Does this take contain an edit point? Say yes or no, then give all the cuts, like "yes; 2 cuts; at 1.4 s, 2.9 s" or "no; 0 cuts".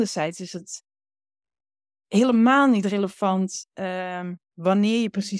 no; 0 cuts